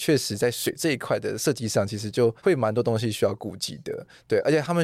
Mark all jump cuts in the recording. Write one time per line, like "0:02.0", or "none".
0:02.4